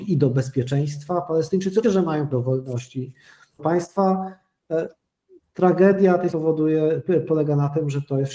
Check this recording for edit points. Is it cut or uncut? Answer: cut